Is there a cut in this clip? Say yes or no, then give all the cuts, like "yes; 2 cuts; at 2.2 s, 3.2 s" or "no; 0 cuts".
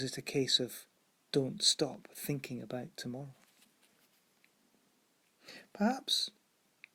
no; 0 cuts